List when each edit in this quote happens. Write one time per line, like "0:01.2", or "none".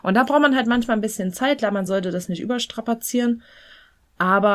none